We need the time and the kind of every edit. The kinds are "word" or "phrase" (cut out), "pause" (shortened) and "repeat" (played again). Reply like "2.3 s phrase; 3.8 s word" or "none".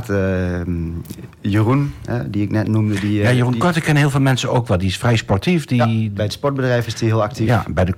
none